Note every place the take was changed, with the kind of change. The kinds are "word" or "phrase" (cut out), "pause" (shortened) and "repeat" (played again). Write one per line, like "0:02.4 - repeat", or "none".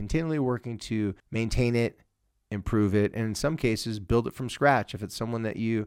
0:01.2 - pause